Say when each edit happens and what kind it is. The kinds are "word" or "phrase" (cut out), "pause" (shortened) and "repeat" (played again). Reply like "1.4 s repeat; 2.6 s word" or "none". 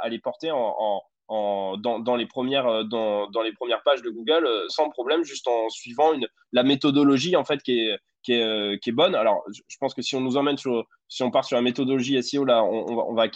4.7 s word